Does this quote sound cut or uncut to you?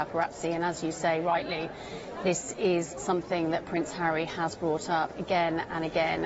uncut